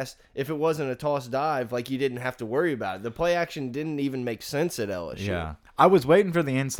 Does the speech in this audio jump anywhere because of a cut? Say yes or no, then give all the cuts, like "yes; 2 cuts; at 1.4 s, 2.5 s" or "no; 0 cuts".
yes; 1 cut; at 5.7 s